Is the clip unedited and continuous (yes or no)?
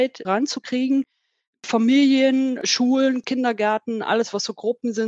yes